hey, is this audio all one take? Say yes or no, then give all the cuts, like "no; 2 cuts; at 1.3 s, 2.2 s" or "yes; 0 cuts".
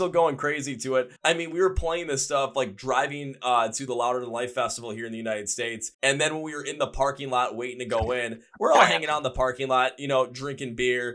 no; 2 cuts; at 1.2 s, 5.9 s